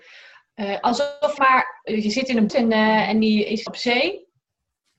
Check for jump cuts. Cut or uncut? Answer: cut